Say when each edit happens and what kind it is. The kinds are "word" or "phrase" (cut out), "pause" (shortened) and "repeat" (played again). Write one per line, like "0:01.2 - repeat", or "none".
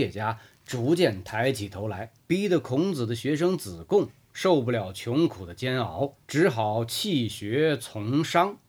0:02.2 - pause
0:06.2 - pause